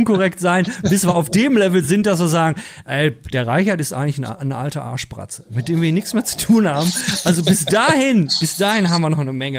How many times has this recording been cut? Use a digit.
0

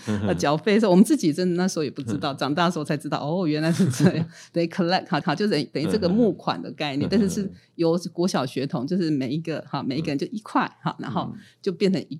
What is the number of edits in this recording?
1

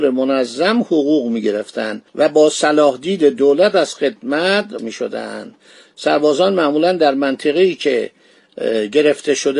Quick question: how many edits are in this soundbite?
2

